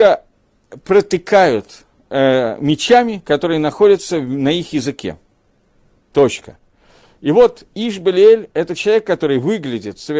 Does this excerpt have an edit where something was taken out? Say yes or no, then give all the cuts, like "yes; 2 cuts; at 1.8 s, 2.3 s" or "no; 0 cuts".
no; 0 cuts